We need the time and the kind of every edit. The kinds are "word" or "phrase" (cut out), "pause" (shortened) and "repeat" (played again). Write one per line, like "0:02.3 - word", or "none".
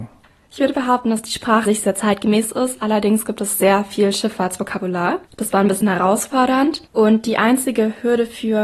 0:01.6 - word
0:05.2 - pause
0:06.9 - pause